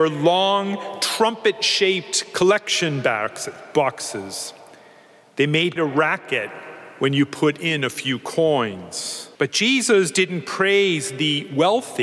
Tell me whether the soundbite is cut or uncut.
cut